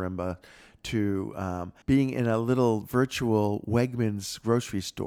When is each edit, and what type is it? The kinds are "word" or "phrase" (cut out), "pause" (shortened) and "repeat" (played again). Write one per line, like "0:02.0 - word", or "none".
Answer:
0:01.8 - pause